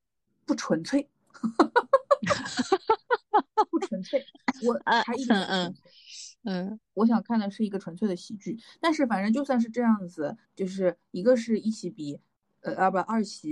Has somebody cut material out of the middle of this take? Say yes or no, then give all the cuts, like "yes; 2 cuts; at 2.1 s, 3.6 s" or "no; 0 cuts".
yes; 3 cuts; at 6.3 s, 6.8 s, 10.4 s